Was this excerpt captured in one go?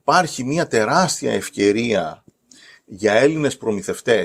yes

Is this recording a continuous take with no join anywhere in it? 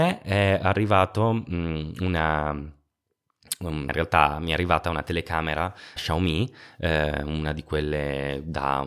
no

